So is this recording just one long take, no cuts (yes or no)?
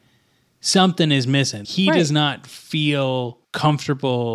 no